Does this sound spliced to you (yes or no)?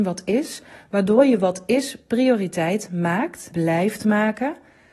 yes